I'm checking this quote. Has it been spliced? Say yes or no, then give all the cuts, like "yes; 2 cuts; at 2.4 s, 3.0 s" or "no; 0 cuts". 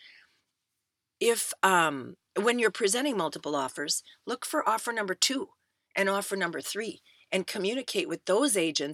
no; 0 cuts